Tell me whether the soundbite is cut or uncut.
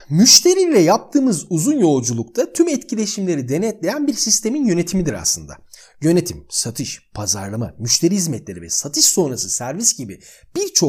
uncut